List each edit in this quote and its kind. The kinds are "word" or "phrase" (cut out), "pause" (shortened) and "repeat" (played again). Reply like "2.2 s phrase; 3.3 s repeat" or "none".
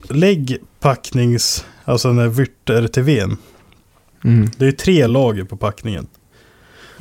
none